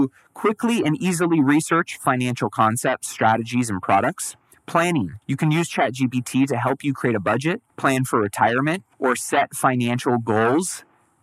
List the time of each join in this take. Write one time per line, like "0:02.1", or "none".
0:05.2
0:07.7
0:08.9